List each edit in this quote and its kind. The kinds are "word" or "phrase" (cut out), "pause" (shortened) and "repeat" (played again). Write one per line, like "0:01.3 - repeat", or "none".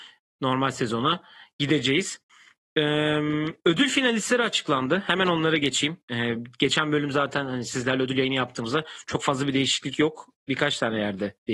none